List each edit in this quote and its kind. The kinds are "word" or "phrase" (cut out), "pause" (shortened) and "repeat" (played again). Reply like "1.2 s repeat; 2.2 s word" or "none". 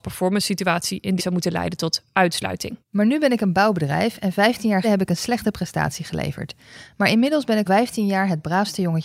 1.2 s phrase; 2.8 s pause; 4.8 s word; 7.7 s word